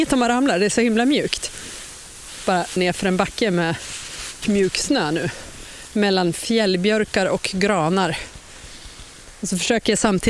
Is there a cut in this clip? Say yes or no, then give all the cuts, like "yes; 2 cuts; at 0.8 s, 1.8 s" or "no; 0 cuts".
yes; 2 cuts; at 2.8 s, 4.4 s